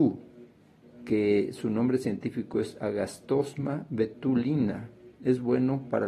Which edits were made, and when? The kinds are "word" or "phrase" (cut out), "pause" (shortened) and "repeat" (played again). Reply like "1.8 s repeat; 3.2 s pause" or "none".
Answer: none